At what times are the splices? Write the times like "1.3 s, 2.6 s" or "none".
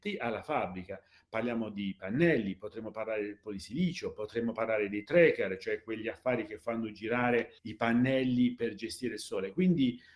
7.6 s